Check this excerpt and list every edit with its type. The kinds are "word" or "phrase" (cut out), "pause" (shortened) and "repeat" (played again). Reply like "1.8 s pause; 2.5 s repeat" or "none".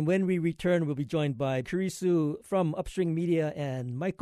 1.6 s word